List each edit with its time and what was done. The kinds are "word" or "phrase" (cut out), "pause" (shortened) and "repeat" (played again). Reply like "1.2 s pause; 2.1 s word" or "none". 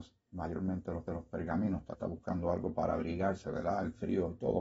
1.1 s repeat; 1.9 s word